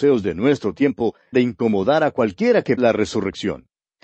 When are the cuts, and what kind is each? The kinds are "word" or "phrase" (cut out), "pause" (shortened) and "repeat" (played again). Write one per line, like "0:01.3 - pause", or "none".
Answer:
0:01.3 - word
0:02.8 - word